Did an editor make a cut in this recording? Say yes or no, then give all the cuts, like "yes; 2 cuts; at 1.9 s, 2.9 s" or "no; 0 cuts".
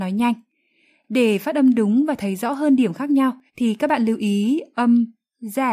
yes; 1 cut; at 3.5 s